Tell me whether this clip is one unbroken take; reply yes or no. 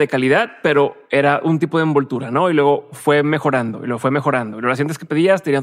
yes